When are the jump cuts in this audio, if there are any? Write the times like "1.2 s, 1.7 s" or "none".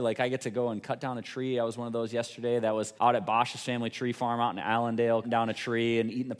3.0 s, 5.2 s